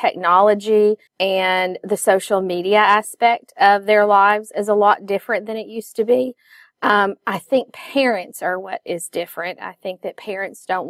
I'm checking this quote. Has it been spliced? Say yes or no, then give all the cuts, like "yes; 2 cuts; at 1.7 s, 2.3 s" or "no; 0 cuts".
yes; 1 cut; at 1.1 s